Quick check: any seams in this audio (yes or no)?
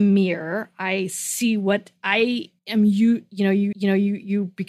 yes